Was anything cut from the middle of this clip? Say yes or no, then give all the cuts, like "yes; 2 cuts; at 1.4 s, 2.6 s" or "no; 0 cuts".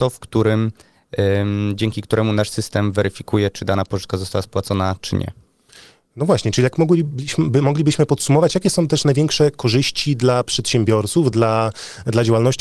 no; 0 cuts